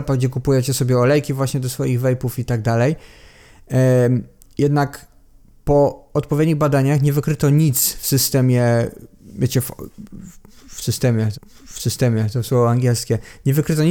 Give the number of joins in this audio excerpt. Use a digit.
1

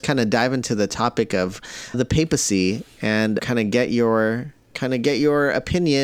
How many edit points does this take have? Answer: 3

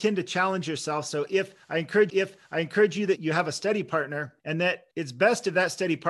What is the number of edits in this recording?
4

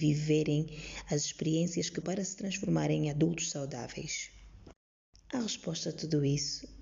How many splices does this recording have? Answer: 1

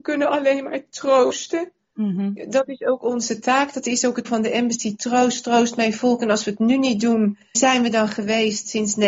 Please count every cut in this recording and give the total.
2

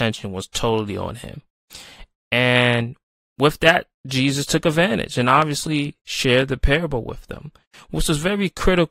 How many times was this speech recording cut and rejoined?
0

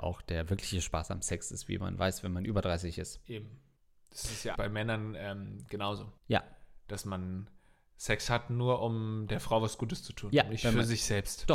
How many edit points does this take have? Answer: 3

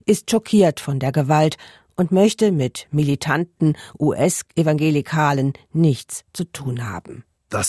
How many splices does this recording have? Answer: 0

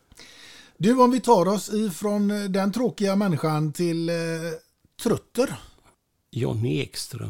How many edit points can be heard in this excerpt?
0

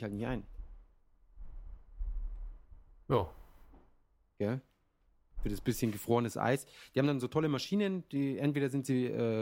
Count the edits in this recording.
0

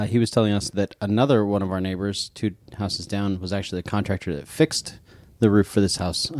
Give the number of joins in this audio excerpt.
0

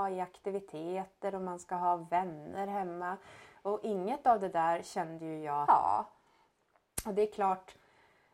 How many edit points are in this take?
1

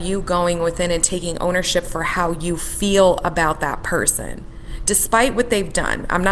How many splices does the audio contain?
0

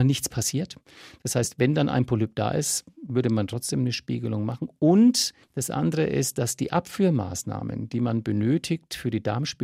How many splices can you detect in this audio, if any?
1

